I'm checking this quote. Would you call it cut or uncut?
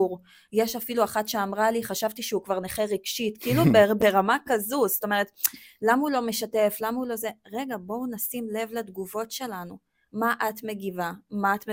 uncut